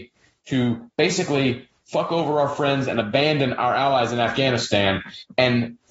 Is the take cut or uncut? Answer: uncut